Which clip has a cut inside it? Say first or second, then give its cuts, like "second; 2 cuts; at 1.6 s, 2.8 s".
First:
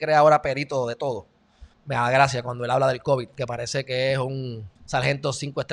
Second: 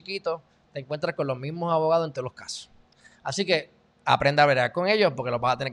first; 2 cuts; at 1.7 s, 4.8 s